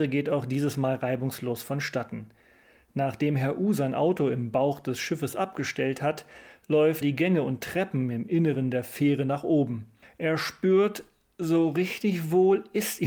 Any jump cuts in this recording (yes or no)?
yes